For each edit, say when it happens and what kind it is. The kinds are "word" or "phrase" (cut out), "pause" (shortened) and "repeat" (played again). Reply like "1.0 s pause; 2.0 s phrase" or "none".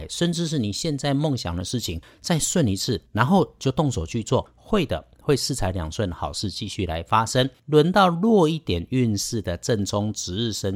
3.1 s pause; 7.6 s pause